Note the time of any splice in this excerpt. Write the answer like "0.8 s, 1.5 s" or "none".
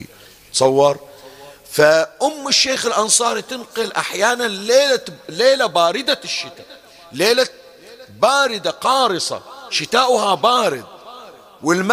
none